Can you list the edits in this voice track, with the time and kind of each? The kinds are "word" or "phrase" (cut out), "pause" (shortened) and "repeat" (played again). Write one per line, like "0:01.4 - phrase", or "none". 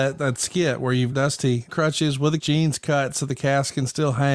0:01.1 - word
0:01.7 - word
0:02.4 - phrase